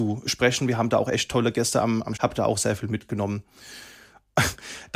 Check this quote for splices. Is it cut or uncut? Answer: cut